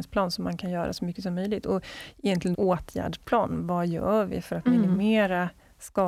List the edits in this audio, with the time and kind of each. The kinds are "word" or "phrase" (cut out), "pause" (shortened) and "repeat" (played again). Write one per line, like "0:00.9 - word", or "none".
0:02.5 - phrase